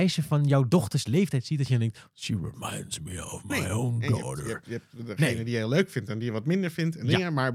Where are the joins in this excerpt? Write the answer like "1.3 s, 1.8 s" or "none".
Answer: none